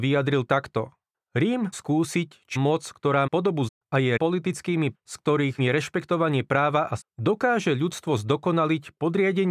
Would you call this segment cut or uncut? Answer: cut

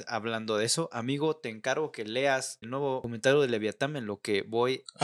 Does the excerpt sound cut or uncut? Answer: cut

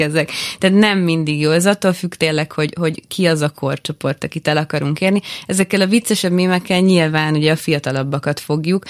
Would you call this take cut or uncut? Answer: uncut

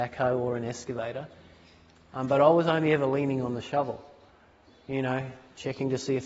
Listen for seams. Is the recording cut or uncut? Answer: uncut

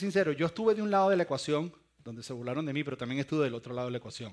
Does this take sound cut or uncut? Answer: uncut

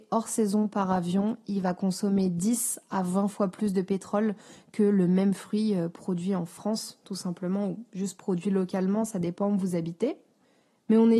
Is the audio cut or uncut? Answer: uncut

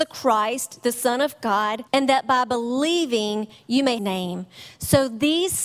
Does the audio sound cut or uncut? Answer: cut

